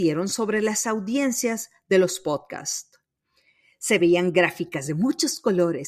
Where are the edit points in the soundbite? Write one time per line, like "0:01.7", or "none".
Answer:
none